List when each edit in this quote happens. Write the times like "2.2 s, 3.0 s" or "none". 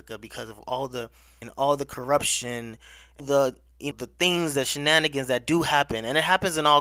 1.4 s, 3.2 s, 3.9 s